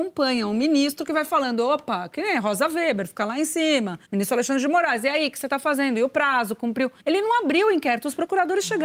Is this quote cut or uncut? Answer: cut